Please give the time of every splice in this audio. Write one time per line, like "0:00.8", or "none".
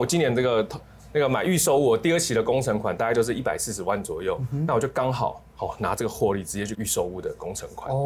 0:06.7